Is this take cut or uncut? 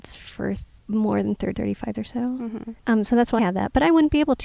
cut